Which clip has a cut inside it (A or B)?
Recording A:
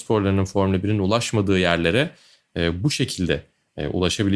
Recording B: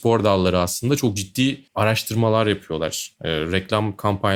B